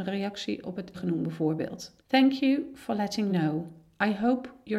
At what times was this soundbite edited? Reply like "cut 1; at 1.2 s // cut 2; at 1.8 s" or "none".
cut 1; at 0.9 s // cut 2; at 2.0 s // cut 3; at 3.3 s